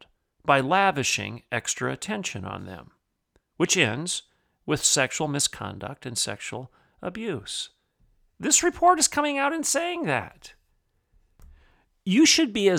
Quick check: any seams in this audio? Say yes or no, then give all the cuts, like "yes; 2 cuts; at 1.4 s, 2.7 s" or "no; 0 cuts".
no; 0 cuts